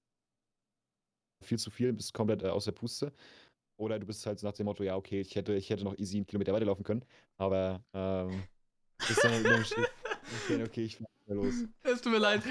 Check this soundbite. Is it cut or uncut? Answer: uncut